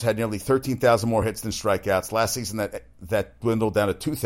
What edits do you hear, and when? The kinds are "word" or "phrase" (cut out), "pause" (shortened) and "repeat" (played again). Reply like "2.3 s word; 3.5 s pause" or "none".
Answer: none